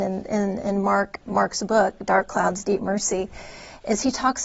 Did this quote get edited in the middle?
yes; 1 cut; at 1.2 s

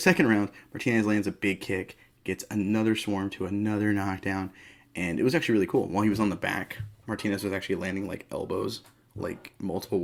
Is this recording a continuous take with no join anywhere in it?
yes; 0 cuts

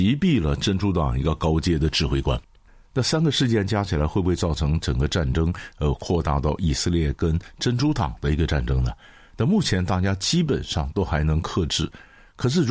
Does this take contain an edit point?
no; 0 cuts

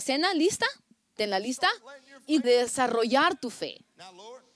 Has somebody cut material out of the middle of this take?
yes; 1 cut; at 2.4 s

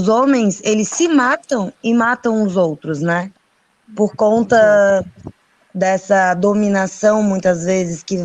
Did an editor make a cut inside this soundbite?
no; 0 cuts

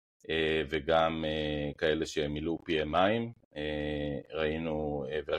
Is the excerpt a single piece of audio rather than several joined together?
yes; 0 cuts

